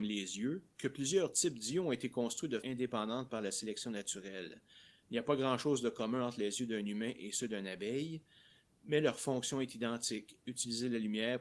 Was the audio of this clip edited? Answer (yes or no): yes